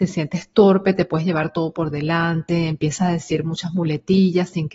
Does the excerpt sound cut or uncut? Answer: uncut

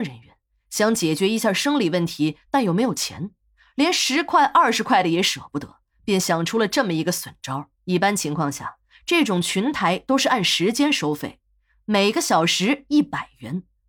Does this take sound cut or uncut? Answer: cut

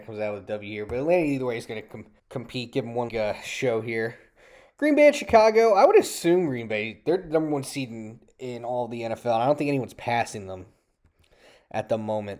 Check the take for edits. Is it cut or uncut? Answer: cut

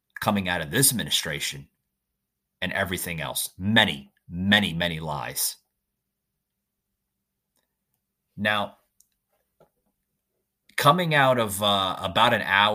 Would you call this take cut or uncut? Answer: uncut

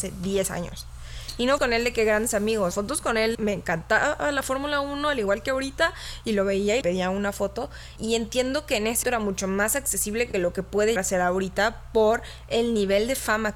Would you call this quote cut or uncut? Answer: cut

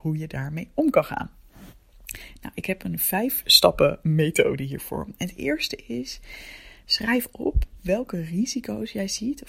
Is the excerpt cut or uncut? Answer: uncut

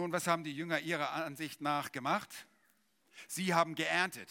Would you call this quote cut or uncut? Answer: uncut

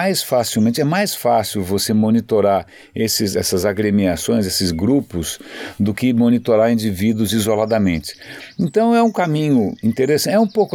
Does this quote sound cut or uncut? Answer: uncut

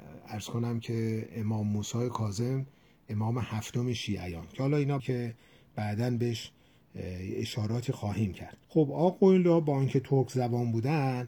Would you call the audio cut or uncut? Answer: cut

